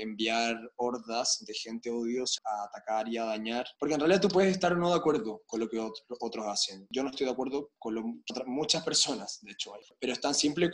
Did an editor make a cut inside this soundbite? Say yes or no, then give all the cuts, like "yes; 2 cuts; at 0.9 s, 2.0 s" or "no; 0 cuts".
yes; 3 cuts; at 2.4 s, 3.7 s, 8.3 s